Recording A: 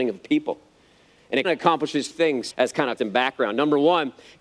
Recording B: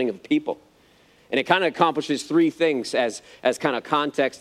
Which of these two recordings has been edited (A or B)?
A